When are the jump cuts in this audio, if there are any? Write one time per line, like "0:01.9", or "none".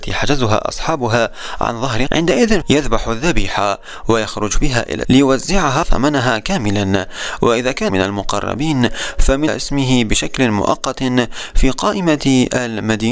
0:02.1
0:02.6
0:05.0
0:05.8
0:07.9
0:09.5